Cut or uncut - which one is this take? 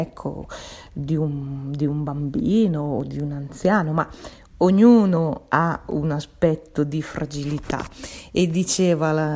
uncut